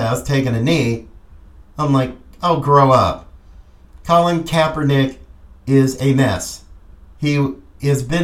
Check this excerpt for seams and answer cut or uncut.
uncut